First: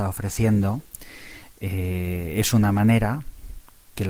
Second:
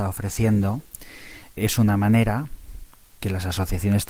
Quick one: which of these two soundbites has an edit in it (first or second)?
second